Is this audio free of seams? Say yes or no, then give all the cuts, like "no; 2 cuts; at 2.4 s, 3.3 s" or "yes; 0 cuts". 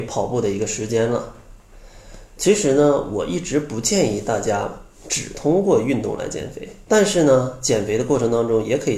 no; 1 cut; at 6.8 s